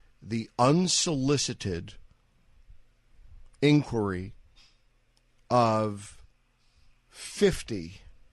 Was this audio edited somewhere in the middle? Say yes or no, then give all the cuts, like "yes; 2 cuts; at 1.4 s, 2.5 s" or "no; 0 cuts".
no; 0 cuts